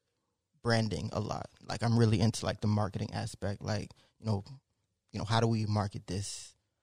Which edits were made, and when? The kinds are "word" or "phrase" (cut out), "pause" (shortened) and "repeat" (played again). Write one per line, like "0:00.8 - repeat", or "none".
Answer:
none